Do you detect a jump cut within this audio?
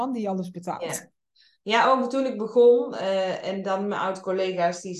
no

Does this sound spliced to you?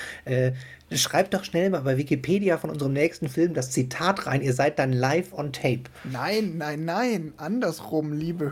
no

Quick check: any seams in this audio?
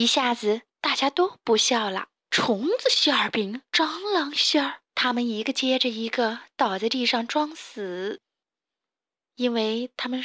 yes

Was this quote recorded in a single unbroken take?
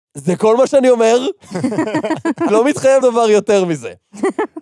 no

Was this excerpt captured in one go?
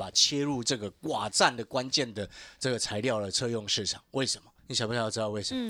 no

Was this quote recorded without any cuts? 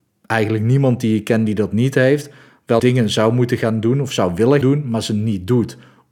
no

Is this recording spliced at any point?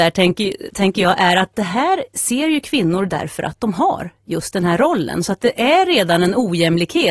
no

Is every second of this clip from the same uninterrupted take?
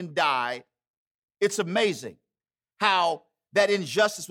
yes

